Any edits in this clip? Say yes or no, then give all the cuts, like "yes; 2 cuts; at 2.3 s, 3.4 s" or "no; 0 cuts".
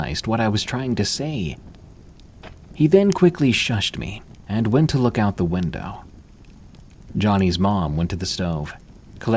no; 0 cuts